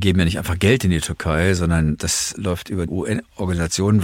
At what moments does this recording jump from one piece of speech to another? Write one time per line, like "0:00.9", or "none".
0:02.9